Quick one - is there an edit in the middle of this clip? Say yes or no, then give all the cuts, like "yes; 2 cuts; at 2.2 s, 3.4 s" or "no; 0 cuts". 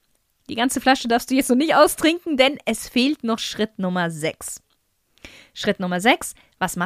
no; 0 cuts